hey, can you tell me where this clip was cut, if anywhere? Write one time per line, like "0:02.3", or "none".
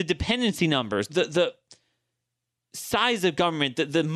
0:01.1